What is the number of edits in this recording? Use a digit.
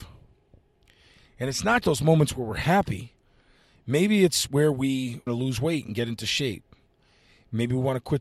2